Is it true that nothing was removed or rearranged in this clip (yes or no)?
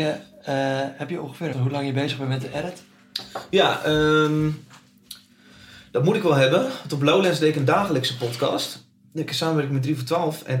no